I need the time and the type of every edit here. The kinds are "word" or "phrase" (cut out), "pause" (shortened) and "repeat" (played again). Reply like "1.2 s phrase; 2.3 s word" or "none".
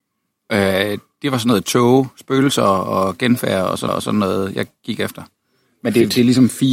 3.9 s repeat